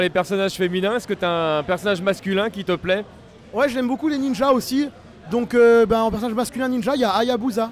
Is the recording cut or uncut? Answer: uncut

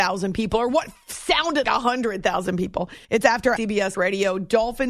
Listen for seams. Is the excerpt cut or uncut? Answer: cut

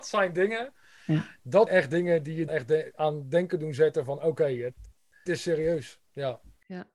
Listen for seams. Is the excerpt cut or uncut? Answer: cut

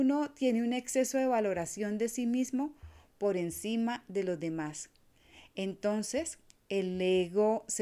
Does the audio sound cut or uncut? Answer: uncut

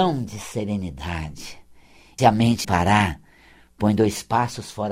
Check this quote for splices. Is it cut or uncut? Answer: cut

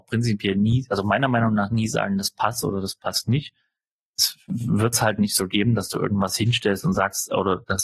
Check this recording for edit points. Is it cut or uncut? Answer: uncut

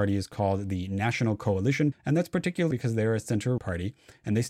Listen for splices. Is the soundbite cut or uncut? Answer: cut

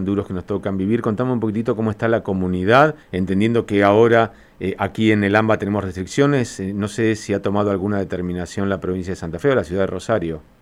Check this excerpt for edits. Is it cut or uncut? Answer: cut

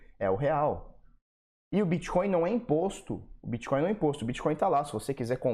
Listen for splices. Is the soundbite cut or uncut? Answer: uncut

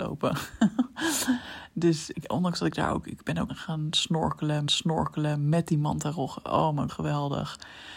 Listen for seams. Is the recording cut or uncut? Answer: cut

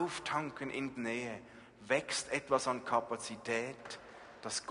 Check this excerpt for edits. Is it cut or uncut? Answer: cut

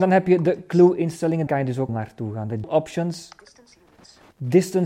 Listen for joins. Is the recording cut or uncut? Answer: cut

